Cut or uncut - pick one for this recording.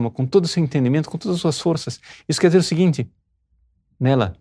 uncut